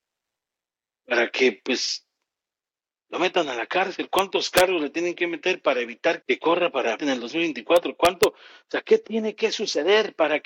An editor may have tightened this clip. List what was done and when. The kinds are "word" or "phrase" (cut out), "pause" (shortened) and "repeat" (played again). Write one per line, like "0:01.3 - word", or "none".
0:06.2 - word
0:07.0 - word